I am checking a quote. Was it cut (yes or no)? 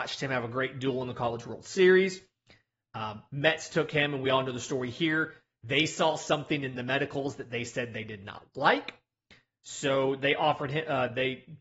no